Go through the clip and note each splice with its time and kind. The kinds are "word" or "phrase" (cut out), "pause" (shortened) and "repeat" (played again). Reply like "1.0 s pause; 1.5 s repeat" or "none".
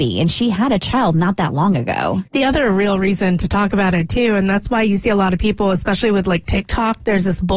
2.3 s pause